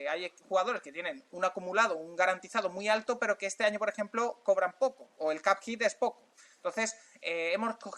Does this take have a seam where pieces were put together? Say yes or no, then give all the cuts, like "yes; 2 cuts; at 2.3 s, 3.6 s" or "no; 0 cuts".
no; 0 cuts